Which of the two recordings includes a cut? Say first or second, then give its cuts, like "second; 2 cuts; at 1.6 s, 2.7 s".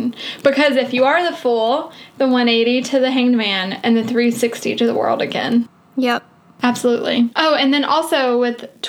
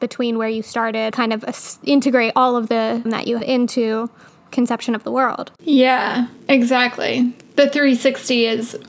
second; 5 cuts; at 1.1 s, 3.1 s, 3.4 s, 4.4 s, 5.6 s